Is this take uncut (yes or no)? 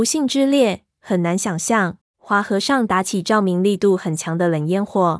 no